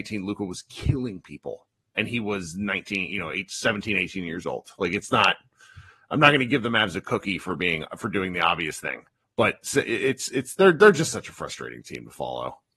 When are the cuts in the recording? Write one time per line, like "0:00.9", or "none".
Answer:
0:09.2